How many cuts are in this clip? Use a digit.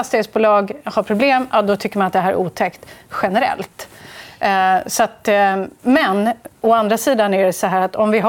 0